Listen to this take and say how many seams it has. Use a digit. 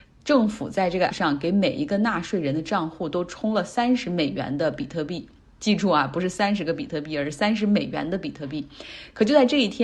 1